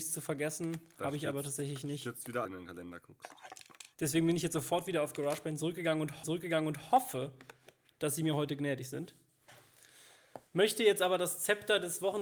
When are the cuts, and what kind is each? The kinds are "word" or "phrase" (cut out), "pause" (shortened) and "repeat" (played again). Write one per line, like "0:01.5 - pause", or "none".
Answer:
0:02.4 - phrase
0:03.9 - pause
0:06.2 - repeat
0:10.5 - pause